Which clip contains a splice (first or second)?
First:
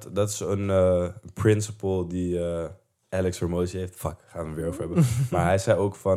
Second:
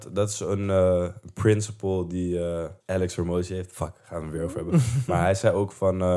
second